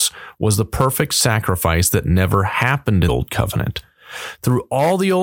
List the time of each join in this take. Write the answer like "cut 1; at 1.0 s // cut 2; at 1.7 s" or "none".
cut 1; at 3.1 s